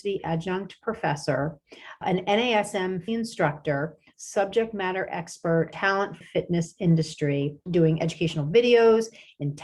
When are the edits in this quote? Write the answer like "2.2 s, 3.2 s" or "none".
2.0 s, 3.1 s, 4.1 s, 5.7 s, 6.2 s, 7.7 s